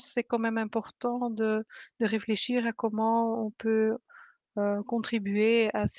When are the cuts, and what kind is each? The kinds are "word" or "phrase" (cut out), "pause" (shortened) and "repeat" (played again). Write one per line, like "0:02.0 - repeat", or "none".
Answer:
none

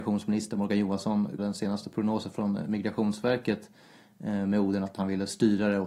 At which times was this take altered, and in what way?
0:01.4 - word

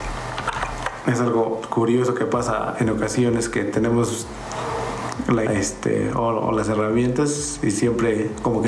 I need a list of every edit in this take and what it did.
0:05.5 - word

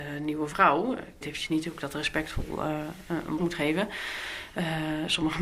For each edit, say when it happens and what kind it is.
0:01.2 - word
0:03.4 - word

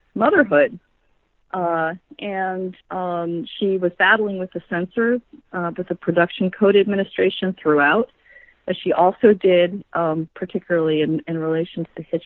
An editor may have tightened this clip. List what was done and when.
0:02.8 - pause

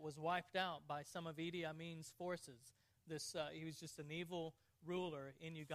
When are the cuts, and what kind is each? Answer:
none

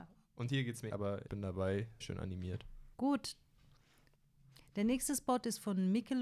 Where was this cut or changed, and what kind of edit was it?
0:00.9 - word
0:01.3 - word
0:02.0 - word
0:02.9 - pause

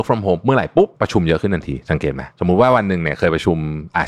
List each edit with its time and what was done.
0:00.9 - pause
0:02.3 - pause

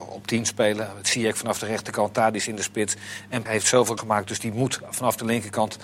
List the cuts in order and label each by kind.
0:03.5 - word
0:04.0 - word

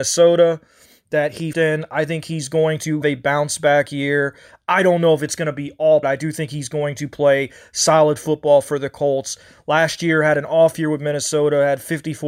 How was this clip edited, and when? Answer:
0:01.5 - word
0:03.0 - word
0:06.0 - phrase

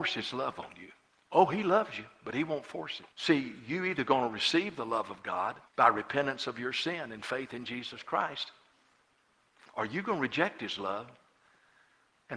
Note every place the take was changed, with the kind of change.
0:01.1 - pause
0:03.1 - pause
0:05.7 - pause

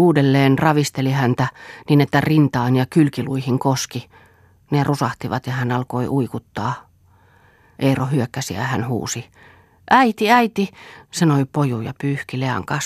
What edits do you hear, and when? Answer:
none

